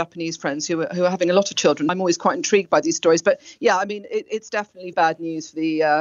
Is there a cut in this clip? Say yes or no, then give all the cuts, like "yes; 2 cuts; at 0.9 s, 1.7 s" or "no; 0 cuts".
yes; 2 cuts; at 1.9 s, 4.9 s